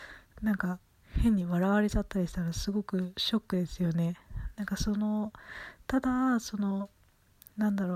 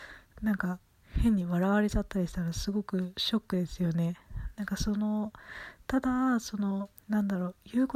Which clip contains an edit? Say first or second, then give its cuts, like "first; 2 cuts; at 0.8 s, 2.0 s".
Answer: second; 1 cut; at 7.0 s